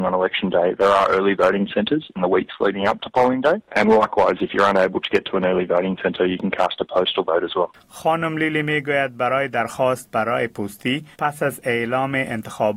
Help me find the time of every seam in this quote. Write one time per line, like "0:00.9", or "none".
0:11.1